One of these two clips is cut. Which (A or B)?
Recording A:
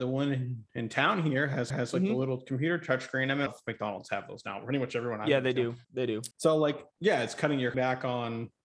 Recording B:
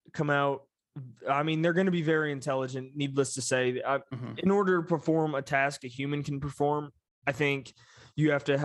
A